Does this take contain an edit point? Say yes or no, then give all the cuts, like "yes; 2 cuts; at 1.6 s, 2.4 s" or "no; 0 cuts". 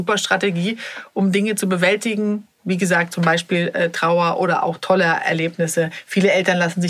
no; 0 cuts